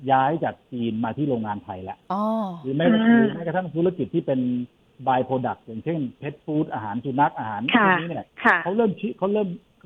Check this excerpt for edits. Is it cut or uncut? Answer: uncut